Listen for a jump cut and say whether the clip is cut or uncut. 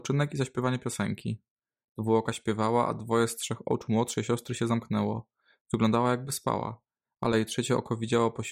uncut